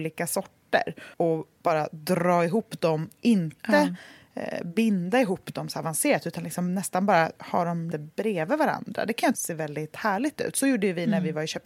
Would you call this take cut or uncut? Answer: cut